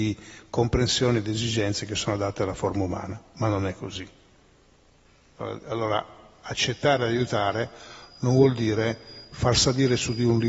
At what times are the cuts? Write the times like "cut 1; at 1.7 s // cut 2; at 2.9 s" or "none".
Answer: none